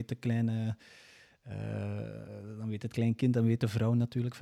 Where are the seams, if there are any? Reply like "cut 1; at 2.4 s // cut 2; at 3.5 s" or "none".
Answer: none